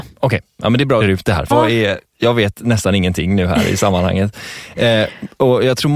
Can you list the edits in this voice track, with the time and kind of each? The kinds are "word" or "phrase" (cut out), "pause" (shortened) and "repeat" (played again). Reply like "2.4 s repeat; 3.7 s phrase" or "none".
1.0 s phrase; 1.5 s word